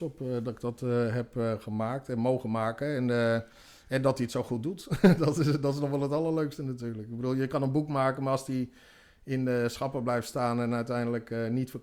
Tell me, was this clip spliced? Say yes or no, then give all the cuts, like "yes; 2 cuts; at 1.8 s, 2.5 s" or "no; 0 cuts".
no; 0 cuts